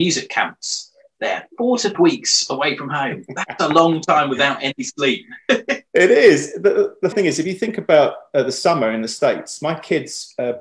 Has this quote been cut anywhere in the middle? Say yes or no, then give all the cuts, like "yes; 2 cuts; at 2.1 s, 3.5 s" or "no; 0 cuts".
yes; 3 cuts; at 1.9 s, 5.9 s, 7.1 s